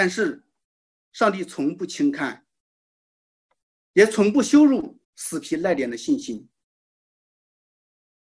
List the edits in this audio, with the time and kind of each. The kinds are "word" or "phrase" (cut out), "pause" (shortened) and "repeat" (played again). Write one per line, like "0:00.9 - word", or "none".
0:05.0 - pause

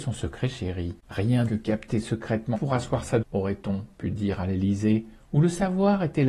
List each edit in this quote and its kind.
0:01.5 - phrase
0:02.5 - word
0:03.2 - word

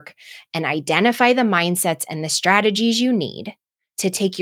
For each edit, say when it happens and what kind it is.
none

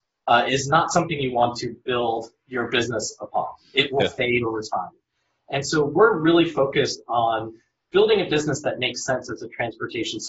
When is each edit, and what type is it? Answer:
none

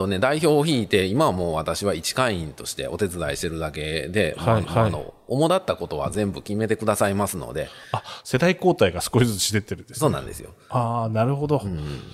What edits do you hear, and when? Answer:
0:04.6 - repeat

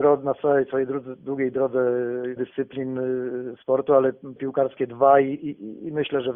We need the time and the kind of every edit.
0:02.4 - phrase
0:04.4 - word

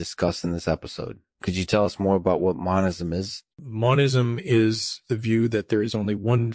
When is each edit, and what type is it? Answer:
0:03.5 - pause

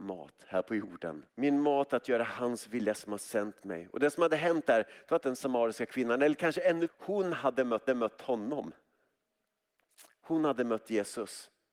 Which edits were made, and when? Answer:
0:01.3 - pause
0:05.2 - phrase
0:06.9 - word
0:07.9 - repeat

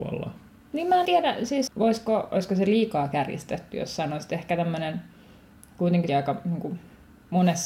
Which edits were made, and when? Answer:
0:01.1 - word
0:01.7 - word
0:06.1 - word

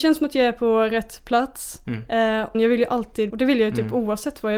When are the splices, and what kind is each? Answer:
0:02.5 - word
0:03.3 - word

